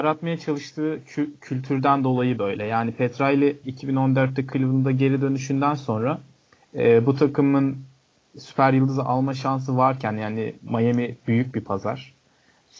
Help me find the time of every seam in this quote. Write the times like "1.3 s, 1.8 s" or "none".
3.6 s

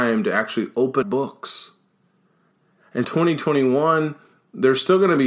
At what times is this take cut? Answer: 1.0 s, 3.0 s

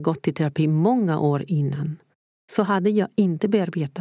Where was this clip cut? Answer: none

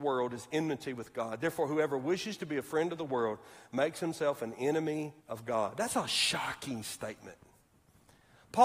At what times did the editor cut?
5.2 s

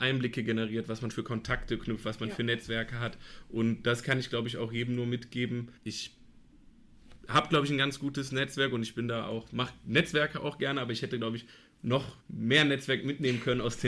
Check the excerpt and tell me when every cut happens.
1.1 s, 5.8 s, 12.2 s

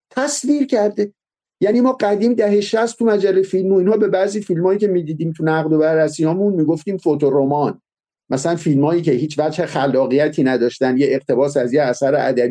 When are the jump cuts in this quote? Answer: none

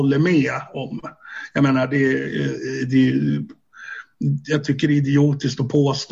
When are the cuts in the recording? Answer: none

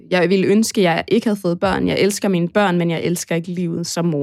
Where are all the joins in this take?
none

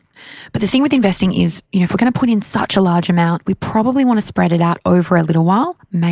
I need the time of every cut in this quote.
none

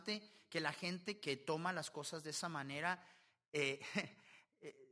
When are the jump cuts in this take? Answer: 1.2 s

